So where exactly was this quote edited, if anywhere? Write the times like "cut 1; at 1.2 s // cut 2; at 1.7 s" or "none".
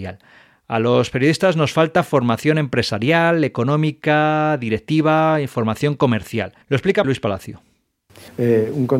cut 1; at 6.6 s // cut 2; at 7.0 s